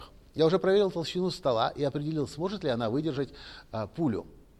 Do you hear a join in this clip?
no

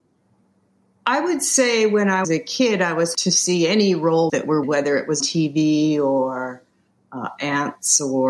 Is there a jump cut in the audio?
yes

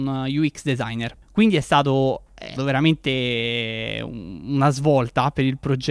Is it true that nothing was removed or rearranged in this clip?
no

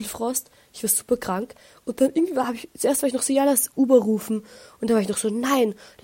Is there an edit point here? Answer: no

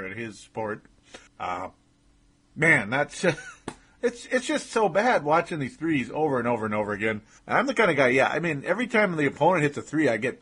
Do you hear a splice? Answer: yes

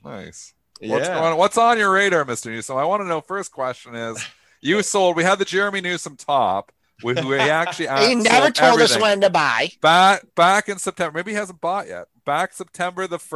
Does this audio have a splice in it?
no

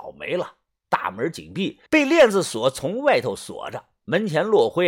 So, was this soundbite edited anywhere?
yes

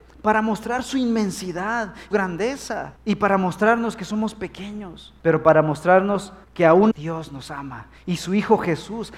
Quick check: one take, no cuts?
no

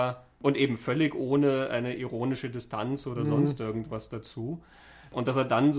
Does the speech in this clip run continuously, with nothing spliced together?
yes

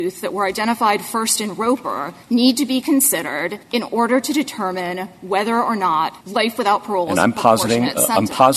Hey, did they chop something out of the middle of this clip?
yes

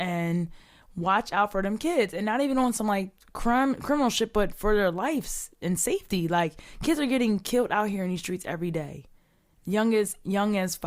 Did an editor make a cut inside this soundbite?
no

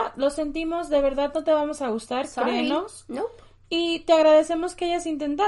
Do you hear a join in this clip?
no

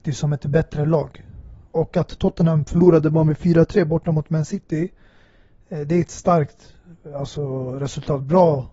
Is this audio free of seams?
yes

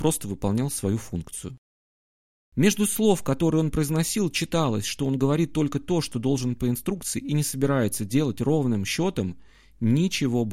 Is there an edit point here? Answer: no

